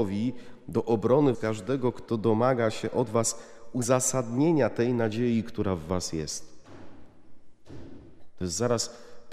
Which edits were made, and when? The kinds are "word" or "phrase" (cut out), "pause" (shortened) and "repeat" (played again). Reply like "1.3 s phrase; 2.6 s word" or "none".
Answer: 1.3 s word